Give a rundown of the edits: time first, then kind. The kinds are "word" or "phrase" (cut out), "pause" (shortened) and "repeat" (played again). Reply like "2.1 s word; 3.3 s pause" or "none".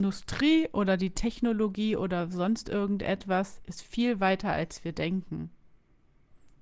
none